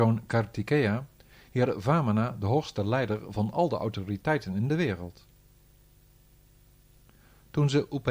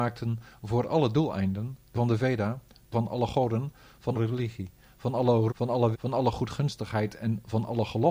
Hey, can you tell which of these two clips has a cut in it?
second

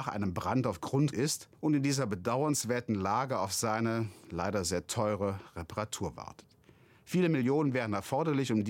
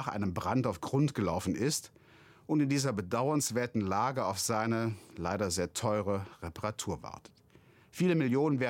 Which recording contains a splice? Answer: first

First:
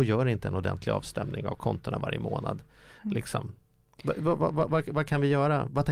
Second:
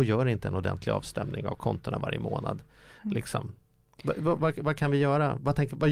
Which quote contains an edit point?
second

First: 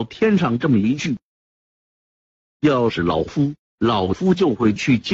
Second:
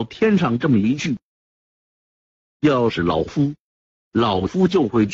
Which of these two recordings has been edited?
first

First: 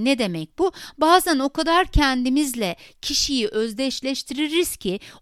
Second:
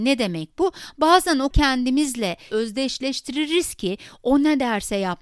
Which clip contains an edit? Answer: second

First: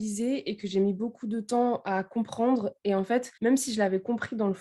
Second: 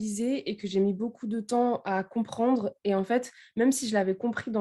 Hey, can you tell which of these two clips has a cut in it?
first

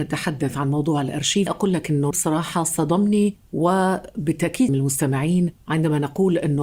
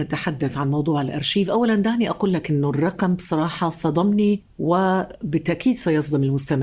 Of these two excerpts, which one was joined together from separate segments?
first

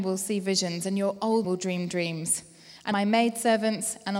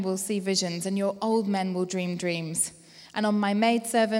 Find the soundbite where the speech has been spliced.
first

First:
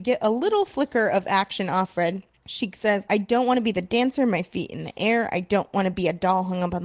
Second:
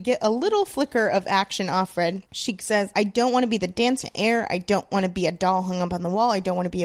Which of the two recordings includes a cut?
second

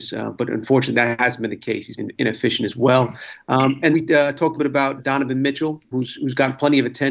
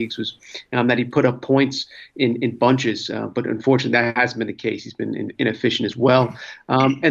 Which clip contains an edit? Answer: first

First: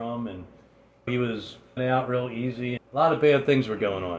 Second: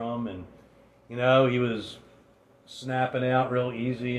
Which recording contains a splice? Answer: first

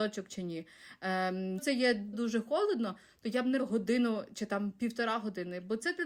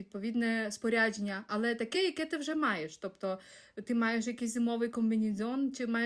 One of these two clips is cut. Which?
first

